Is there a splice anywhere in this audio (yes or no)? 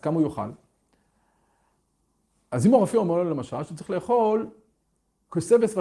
no